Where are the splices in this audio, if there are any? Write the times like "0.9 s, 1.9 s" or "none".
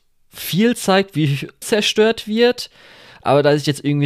1.6 s